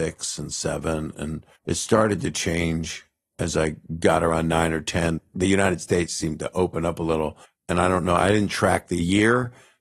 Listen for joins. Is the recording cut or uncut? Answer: cut